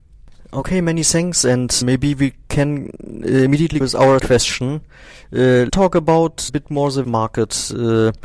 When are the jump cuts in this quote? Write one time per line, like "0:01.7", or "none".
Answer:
0:01.8
0:03.8
0:04.2
0:05.7
0:06.5
0:07.0